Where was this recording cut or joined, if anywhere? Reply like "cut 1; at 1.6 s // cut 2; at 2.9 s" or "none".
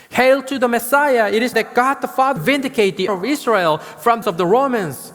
cut 1; at 1.5 s // cut 2; at 2.4 s // cut 3; at 3.1 s // cut 4; at 4.2 s